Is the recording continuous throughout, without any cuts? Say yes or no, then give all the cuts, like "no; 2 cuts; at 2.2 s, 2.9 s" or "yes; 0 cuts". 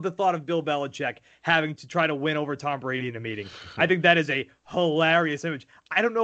yes; 0 cuts